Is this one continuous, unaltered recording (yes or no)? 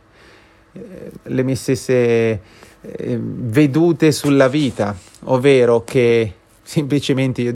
yes